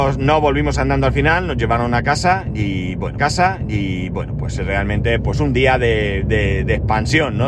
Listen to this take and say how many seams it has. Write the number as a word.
one